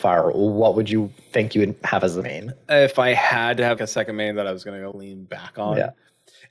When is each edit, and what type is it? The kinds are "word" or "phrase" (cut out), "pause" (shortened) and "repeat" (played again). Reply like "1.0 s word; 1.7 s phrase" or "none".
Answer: 2.2 s word; 3.8 s word; 4.9 s word